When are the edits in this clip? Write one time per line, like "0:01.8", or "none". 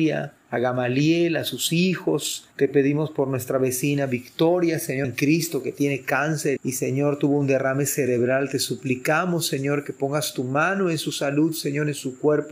0:02.5
0:05.0
0:06.6